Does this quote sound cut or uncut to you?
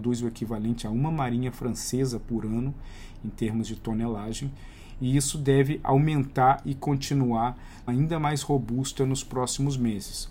cut